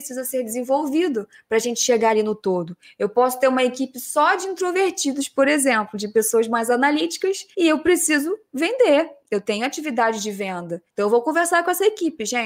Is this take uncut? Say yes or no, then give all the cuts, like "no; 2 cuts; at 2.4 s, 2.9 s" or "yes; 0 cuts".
no; 2 cuts; at 7.5 s, 10.9 s